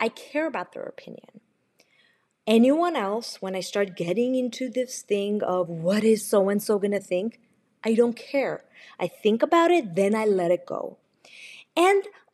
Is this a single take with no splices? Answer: yes; 0 cuts

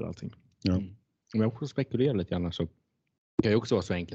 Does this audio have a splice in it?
no; 0 cuts

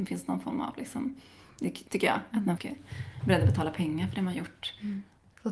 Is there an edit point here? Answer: yes; 2 cuts; at 1.9 s, 2.6 s

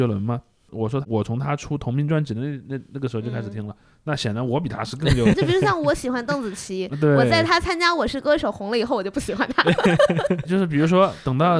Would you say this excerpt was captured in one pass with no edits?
no; 2 cuts; at 5.3 s, 10.4 s

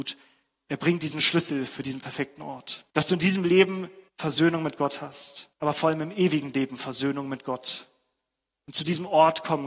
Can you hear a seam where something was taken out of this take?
yes; 3 cuts; at 2.9 s, 4.1 s, 5.5 s

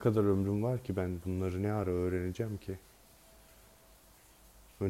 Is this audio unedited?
yes; 0 cuts

